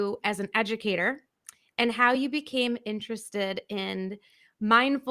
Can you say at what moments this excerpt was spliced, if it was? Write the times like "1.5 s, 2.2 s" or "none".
none